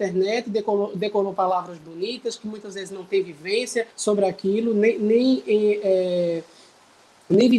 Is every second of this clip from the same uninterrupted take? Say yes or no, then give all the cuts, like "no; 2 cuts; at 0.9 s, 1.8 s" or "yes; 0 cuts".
no; 1 cut; at 3.9 s